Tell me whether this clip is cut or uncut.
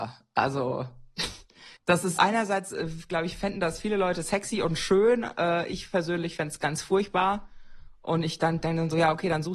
cut